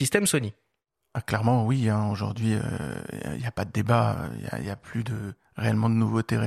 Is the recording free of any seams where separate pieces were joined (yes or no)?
yes